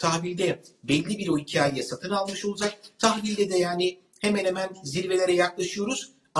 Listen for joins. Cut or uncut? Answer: uncut